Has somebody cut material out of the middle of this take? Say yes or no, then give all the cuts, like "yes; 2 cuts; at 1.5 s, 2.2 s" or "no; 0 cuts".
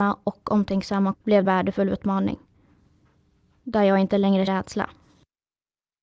yes; 3 cuts; at 1.1 s, 1.4 s, 4.5 s